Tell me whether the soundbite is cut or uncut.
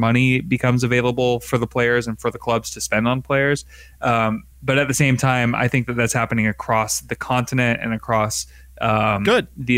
uncut